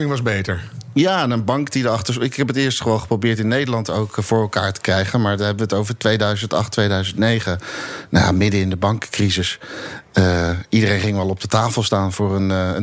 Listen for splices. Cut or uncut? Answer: uncut